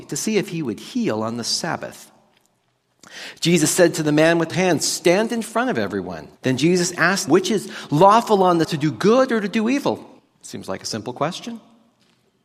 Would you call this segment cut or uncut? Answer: cut